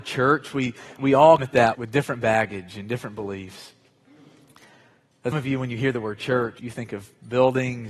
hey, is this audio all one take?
no; 5 cuts; at 1.0 s, 1.4 s, 1.7 s, 5.3 s, 6.6 s

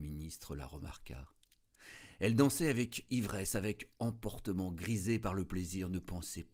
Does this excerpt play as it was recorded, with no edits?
yes; 0 cuts

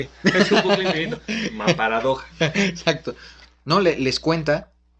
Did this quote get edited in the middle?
no; 0 cuts

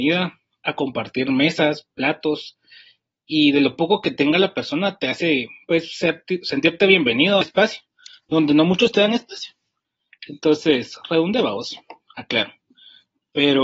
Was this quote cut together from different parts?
yes; 1 cut; at 7.4 s

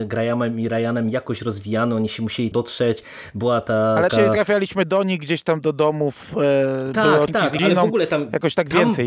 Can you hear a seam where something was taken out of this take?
yes; 4 cuts; at 2.5 s, 4.1 s, 7.3 s, 7.6 s

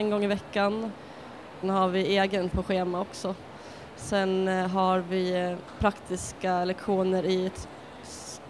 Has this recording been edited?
yes; 2 cuts; at 1.6 s, 2.5 s

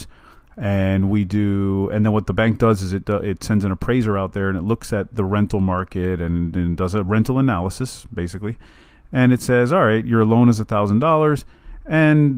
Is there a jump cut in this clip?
no; 0 cuts

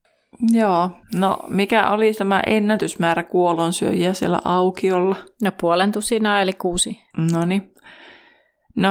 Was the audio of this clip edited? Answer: yes; 2 cuts; at 1.0 s, 7.1 s

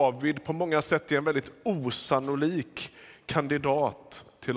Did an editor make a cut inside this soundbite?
no; 0 cuts

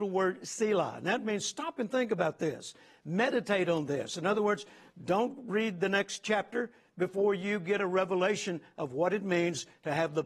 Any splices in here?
no; 0 cuts

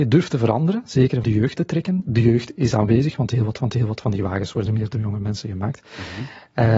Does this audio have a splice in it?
yes; 4 cuts; at 1.2 s, 1.5 s, 3.6 s, 4.7 s

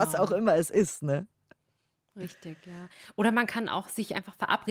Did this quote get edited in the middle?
no; 0 cuts

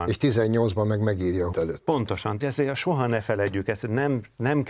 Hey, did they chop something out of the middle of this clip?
yes; 2 cuts; at 1.5 s, 2.4 s

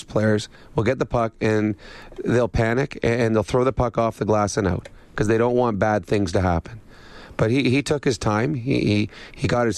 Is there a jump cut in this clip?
no; 0 cuts

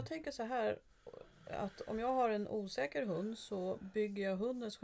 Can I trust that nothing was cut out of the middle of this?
yes; 0 cuts

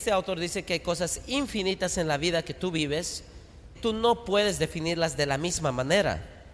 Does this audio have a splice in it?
yes; 1 cut; at 3.8 s

